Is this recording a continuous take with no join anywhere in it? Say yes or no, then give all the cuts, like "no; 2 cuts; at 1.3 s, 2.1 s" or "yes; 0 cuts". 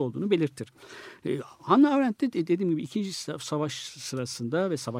yes; 0 cuts